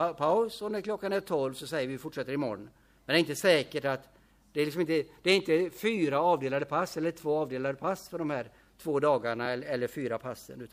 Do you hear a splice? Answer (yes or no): no